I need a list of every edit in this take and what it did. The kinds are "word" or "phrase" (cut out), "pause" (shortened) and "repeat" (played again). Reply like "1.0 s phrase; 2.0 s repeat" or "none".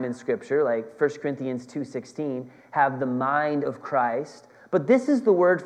none